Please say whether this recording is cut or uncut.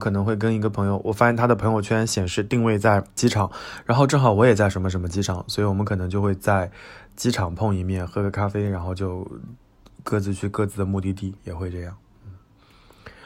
cut